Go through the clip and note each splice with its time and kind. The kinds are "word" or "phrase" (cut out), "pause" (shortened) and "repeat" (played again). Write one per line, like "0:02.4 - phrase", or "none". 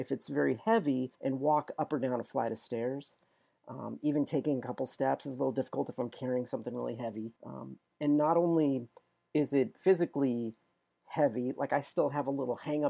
0:01.1 - pause
0:07.4 - pause